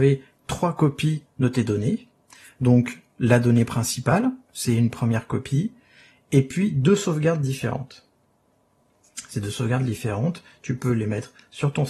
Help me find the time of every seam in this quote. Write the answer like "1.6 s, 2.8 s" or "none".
none

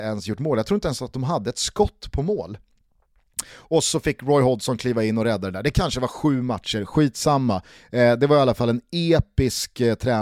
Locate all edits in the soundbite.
none

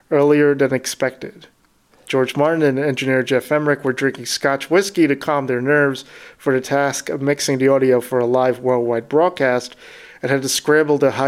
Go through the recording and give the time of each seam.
none

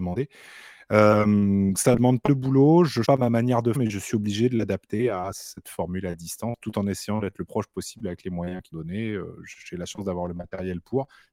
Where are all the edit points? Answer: 1.7 s, 2.3 s, 3.0 s, 3.7 s, 7.5 s, 8.7 s

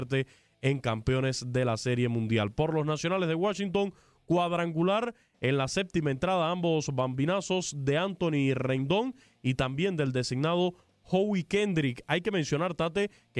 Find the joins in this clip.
none

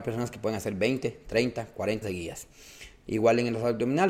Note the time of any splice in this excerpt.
2.0 s

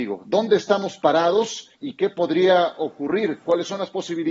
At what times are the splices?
1.8 s

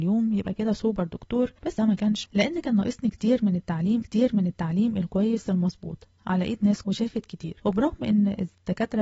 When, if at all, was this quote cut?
1.8 s, 2.3 s, 4.0 s, 6.8 s

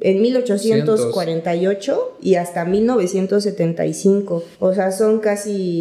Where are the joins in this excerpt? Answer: 4.5 s

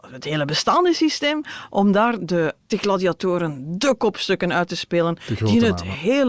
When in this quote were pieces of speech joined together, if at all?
2.2 s, 2.7 s

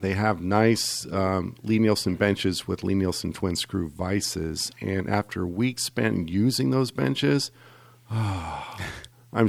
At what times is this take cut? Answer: none

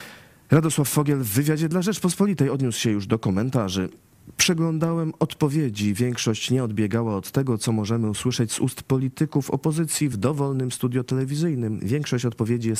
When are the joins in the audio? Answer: none

